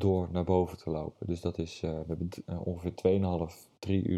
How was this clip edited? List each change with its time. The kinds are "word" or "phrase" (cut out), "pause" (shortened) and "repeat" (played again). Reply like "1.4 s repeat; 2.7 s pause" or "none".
none